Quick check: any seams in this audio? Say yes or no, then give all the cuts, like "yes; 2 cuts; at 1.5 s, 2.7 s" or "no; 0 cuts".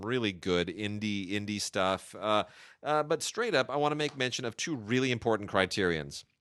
no; 0 cuts